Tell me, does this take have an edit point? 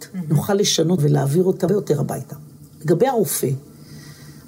yes; 2 cuts; at 1.0 s, 1.7 s

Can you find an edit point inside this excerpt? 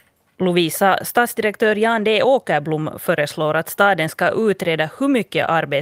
no; 0 cuts

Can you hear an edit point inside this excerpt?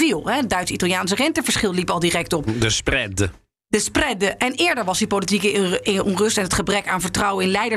no; 0 cuts

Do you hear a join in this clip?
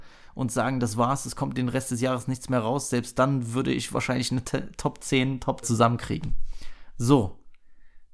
yes; 2 cuts; at 4.4 s, 5.6 s

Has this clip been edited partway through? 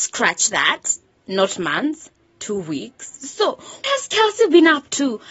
yes; 1 cut; at 3.8 s

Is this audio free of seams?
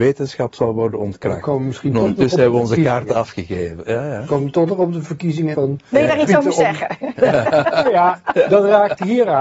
no; 1 cut; at 5.5 s

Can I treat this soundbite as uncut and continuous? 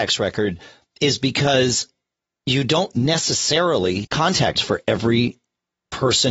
no; 2 cuts; at 4.0 s, 4.6 s

